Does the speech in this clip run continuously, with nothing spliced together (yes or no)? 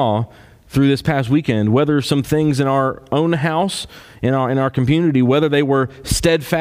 yes